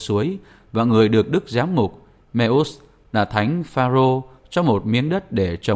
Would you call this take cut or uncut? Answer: uncut